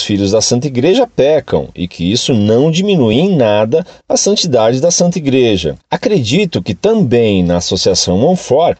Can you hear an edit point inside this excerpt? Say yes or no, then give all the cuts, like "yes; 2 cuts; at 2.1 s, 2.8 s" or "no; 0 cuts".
no; 0 cuts